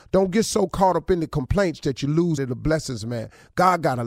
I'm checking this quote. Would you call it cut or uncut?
cut